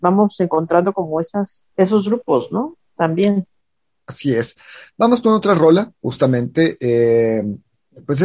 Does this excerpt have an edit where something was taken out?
yes; 1 cut; at 1.7 s

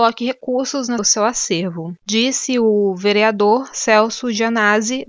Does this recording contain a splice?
yes; 1 cut; at 1.0 s

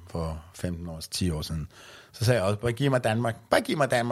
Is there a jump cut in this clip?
no; 0 cuts

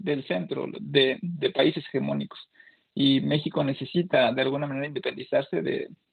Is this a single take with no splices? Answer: yes; 0 cuts

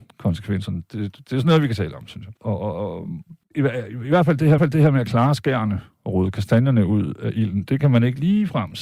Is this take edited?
yes; 3 cuts; at 2.4 s, 3.4 s, 4.6 s

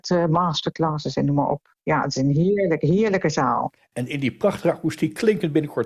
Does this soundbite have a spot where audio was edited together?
no; 0 cuts

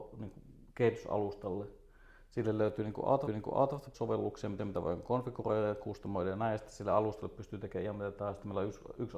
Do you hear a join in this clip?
yes; 3 cuts; at 3.3 s, 3.9 s, 4.6 s

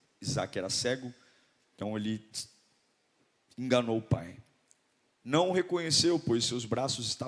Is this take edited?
no; 0 cuts

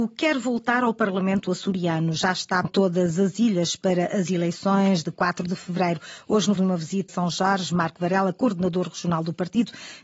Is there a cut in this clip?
yes; 3 cuts; at 2.6 s, 6.6 s, 7.1 s

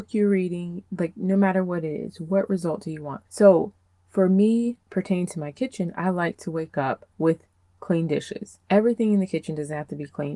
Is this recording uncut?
no; 4 cuts; at 3.3 s, 4.8 s, 7.1 s, 8.6 s

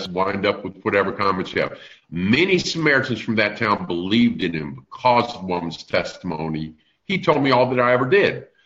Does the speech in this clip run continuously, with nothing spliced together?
yes; 0 cuts

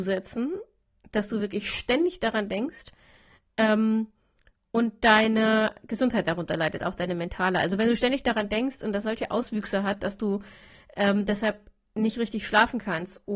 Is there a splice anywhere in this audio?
no; 0 cuts

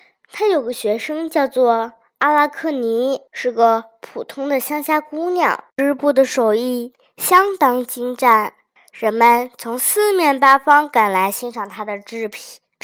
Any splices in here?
yes; 3 cuts; at 3.3 s, 5.7 s, 8.8 s

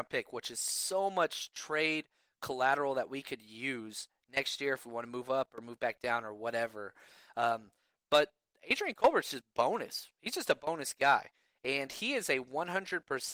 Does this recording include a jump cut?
no; 0 cuts

